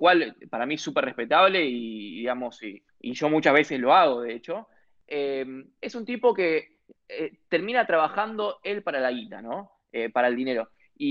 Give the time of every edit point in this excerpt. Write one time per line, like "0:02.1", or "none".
0:02.9